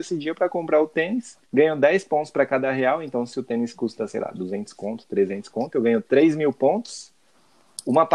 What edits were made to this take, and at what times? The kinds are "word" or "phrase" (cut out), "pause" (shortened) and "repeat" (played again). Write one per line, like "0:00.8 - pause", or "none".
0:01.4 - pause